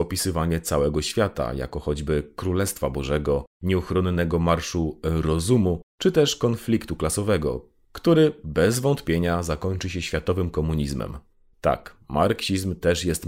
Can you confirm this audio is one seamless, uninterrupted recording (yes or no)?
yes